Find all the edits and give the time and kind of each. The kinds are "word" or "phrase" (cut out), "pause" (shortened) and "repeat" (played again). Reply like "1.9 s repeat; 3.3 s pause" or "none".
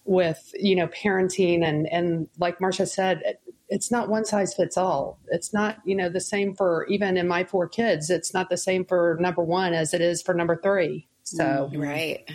none